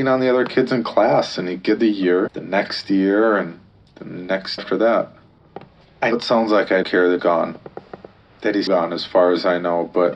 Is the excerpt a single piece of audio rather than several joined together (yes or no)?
no